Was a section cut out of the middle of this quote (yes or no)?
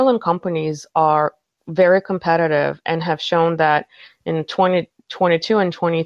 no